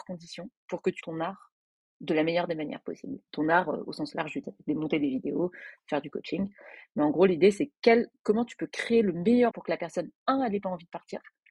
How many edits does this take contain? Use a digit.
3